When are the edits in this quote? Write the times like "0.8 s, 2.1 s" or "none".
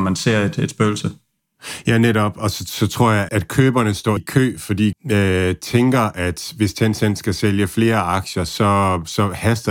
3.3 s, 4.2 s, 4.9 s

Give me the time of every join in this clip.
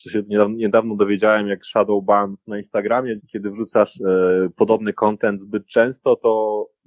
2.4 s, 3.2 s

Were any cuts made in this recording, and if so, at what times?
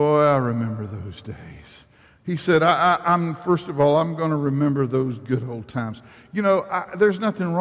none

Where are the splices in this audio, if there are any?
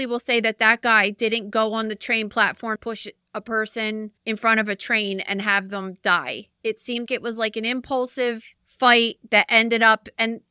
2.8 s, 4.2 s, 7.1 s, 8.6 s

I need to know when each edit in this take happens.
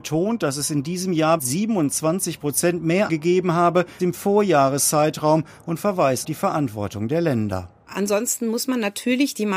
1.4 s, 3.1 s, 4.0 s, 6.2 s

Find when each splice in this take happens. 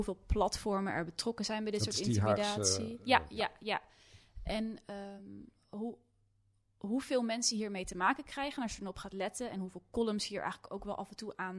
none

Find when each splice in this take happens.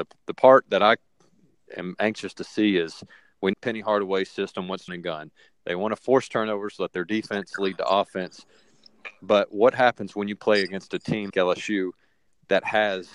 3.5 s, 4.9 s, 11.3 s

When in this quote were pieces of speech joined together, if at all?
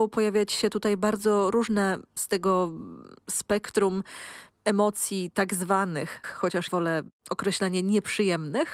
2.2 s, 6.2 s, 6.7 s

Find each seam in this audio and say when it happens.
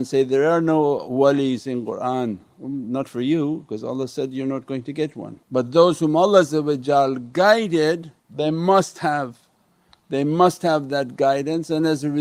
5.4 s, 8.2 s

